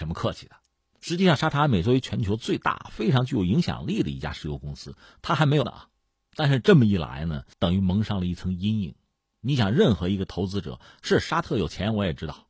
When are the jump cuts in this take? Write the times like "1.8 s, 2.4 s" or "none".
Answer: 5.6 s, 7.5 s